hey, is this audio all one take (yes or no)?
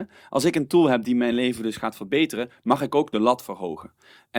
yes